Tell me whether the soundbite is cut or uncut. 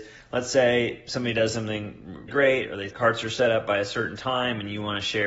cut